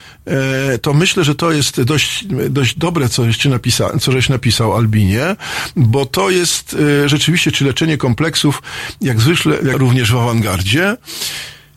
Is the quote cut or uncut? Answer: cut